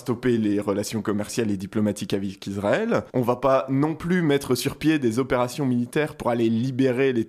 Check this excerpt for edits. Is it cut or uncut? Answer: cut